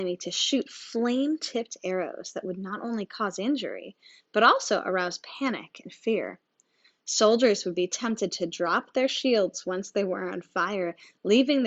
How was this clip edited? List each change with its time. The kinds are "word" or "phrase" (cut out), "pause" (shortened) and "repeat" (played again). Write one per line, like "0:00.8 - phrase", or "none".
none